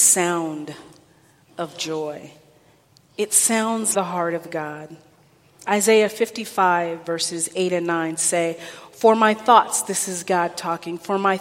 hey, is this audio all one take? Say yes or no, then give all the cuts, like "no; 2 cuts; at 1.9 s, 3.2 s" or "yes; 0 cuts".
no; 1 cut; at 3.9 s